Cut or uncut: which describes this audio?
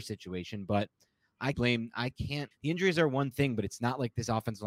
cut